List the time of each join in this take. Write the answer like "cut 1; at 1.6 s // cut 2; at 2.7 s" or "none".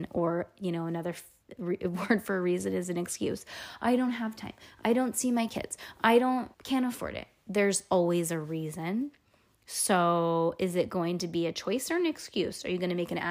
cut 1; at 6.5 s